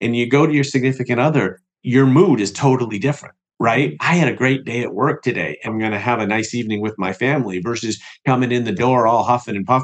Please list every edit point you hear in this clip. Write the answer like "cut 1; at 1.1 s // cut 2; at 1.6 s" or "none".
cut 1; at 5.7 s